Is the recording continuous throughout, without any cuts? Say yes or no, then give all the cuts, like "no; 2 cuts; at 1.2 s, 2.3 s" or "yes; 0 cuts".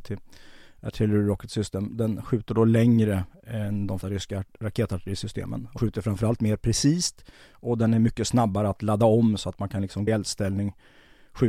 no; 3 cuts; at 4.0 s, 5.8 s, 10.1 s